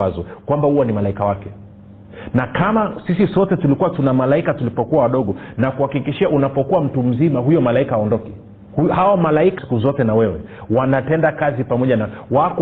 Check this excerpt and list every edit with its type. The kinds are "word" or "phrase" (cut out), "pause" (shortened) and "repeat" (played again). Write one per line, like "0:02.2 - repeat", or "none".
0:09.6 - word